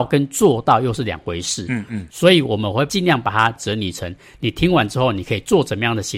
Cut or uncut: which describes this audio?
uncut